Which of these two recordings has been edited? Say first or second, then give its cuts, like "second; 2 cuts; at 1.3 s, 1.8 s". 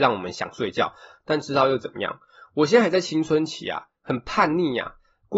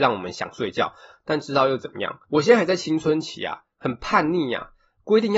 second; 1 cut; at 2.2 s